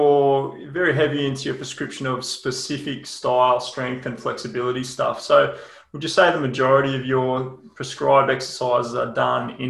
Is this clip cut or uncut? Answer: uncut